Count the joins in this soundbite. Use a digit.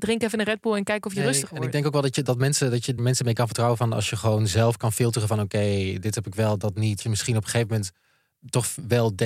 2